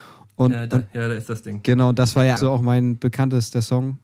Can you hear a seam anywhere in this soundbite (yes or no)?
yes